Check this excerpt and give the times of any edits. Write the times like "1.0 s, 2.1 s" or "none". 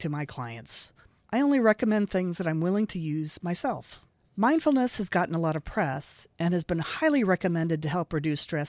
4.1 s